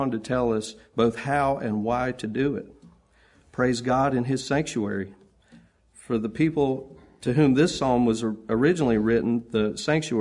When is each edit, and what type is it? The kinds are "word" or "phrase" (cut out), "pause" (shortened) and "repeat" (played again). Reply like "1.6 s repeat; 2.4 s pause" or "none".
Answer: none